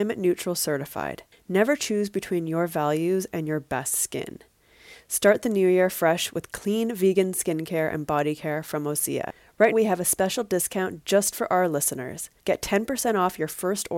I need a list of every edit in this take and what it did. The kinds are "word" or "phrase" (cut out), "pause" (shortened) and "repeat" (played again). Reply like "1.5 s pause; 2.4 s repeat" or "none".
1.3 s pause; 9.7 s word; 12.4 s pause